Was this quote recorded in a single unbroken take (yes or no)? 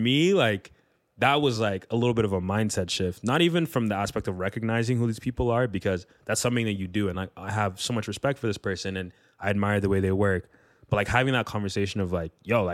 yes